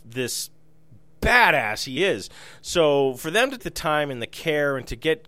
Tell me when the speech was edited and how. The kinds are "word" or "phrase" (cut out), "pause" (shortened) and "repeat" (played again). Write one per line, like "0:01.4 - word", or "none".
0:02.0 - word
0:03.6 - word